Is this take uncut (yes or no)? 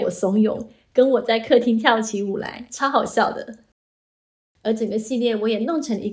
yes